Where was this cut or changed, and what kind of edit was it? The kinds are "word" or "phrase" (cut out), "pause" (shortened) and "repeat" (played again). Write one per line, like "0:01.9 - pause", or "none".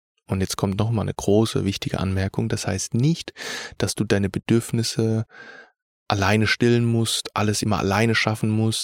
none

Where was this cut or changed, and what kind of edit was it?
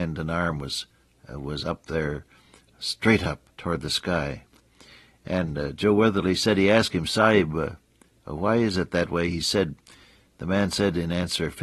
0:03.5 - pause

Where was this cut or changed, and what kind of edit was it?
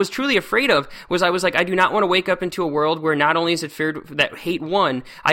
none

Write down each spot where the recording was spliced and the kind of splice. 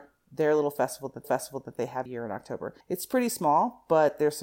0:01.2 - repeat
0:02.1 - word
0:02.8 - pause

